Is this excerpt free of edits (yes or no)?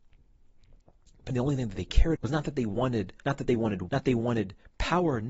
no